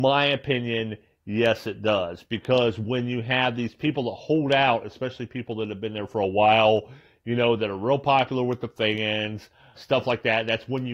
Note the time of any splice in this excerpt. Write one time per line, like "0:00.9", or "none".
0:09.8